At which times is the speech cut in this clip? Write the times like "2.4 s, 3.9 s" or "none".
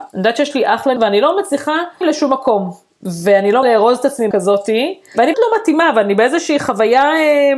1.0 s, 2.0 s, 3.6 s, 4.3 s, 5.3 s

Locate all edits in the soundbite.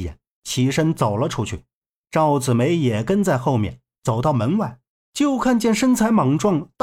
1.8 s, 4.9 s

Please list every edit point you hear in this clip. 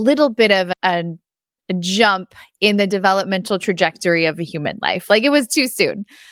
none

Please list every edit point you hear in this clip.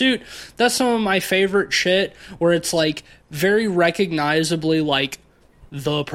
none

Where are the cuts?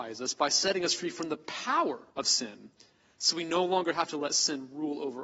2.1 s

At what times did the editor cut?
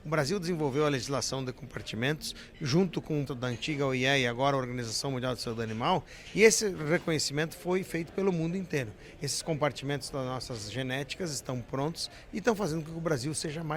3.3 s

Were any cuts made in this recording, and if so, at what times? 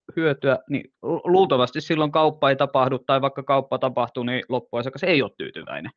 1.0 s

